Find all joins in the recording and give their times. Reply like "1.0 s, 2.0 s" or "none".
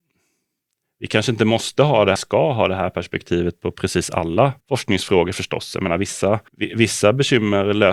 2.2 s, 4.6 s, 6.5 s